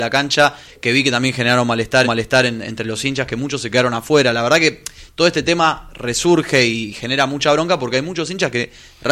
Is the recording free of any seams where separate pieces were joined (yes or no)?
no